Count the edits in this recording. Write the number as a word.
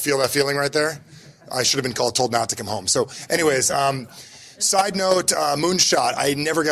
zero